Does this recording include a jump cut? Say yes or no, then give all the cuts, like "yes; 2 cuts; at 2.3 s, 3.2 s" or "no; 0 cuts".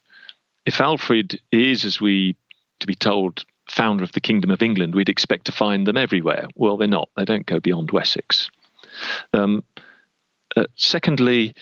yes; 3 cuts; at 2.8 s, 3.6 s, 9.3 s